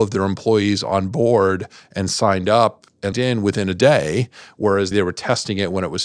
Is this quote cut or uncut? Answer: cut